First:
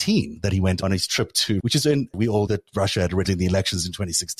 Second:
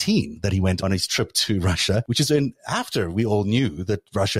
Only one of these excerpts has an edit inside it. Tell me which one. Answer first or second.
first